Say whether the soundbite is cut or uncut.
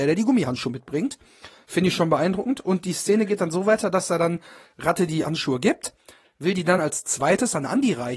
uncut